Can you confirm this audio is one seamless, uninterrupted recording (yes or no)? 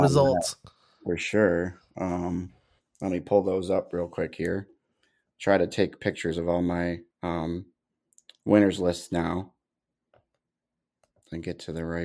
no